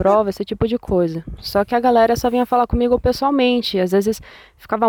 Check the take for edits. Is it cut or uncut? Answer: uncut